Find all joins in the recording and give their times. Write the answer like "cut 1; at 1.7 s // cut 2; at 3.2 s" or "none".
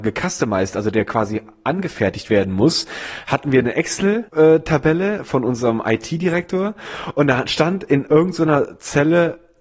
cut 1; at 4.3 s